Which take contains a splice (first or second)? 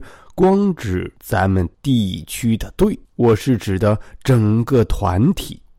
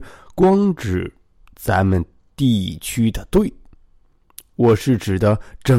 first